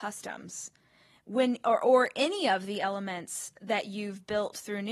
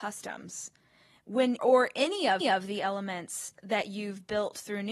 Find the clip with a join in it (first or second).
second